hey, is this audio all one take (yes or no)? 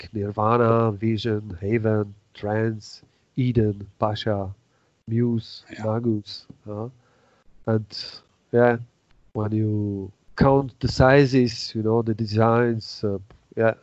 yes